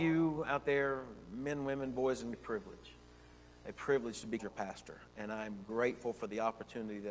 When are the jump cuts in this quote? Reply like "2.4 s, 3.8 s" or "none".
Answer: 2.3 s, 4.4 s